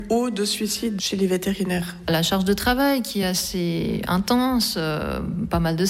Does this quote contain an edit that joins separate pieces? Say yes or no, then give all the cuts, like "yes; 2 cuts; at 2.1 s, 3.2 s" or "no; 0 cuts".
no; 0 cuts